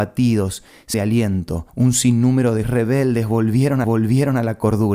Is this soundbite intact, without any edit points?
no; 4 cuts; at 0.9 s, 1.7 s, 2.6 s, 3.8 s

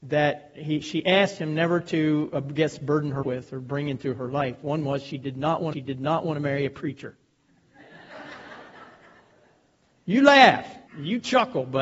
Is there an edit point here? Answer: yes; 3 cuts; at 3.2 s, 5.7 s, 10.9 s

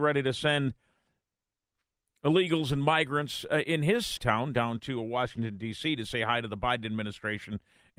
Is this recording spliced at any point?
yes; 1 cut; at 4.2 s

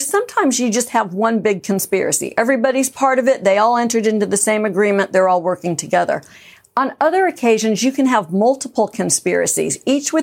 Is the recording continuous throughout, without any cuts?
yes; 0 cuts

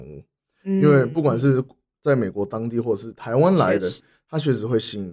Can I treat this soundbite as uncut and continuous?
yes; 0 cuts

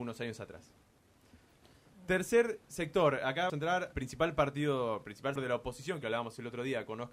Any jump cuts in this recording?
yes; 4 cuts; at 2.6 s, 3.5 s, 3.9 s, 5.4 s

